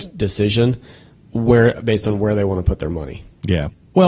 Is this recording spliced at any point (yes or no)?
no